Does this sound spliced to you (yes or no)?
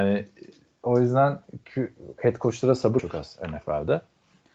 yes